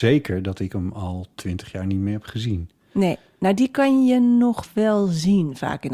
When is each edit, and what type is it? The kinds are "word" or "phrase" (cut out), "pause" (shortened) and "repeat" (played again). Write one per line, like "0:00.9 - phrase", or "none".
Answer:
none

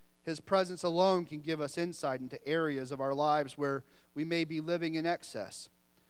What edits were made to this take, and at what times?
none

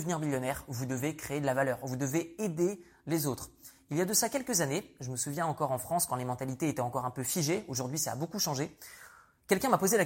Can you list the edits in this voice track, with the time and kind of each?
none

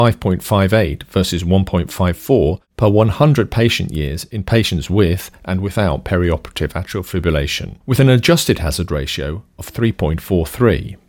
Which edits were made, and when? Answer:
0:07.8 - pause

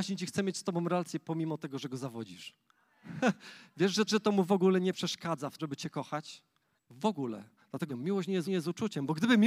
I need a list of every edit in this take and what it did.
0:04.1 - repeat
0:05.6 - word
0:06.7 - pause
0:07.9 - phrase
0:08.4 - repeat

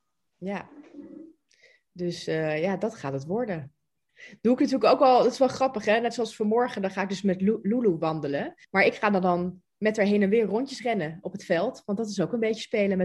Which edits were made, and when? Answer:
0:08.6 - pause

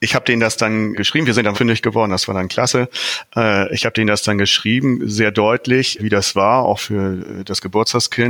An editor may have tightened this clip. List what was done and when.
0:00.9 - word
0:01.5 - word
0:06.0 - word
0:06.8 - word

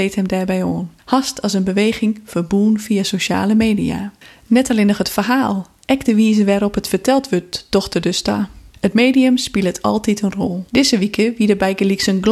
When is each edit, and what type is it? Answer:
0:01.0 - pause
0:04.2 - pause
0:08.7 - pause
0:10.7 - pause

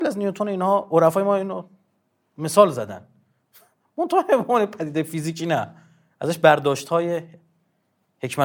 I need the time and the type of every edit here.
none

